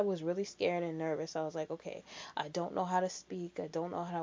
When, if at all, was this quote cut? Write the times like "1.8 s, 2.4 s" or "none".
none

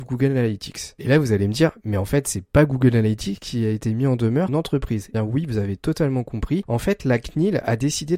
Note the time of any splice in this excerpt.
4.5 s, 5.1 s

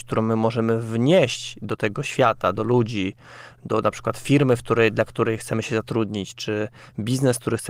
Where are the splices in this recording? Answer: none

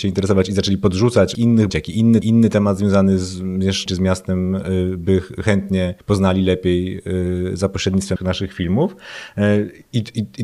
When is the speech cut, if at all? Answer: 1.3 s, 1.7 s, 2.2 s, 3.9 s, 6.0 s, 8.2 s

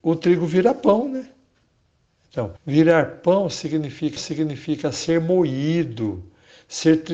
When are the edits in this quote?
2.6 s, 4.2 s

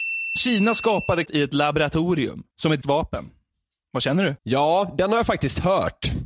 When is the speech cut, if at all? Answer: 1.3 s, 2.5 s, 2.8 s, 4.4 s

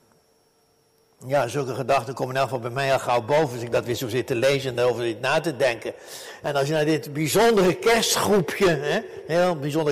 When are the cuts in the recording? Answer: none

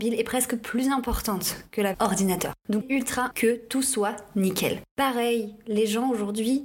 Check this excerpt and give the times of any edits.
1.9 s, 2.8 s, 3.3 s

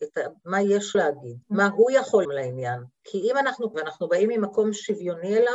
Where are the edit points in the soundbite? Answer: 0.9 s, 1.4 s, 2.2 s, 2.9 s, 3.7 s

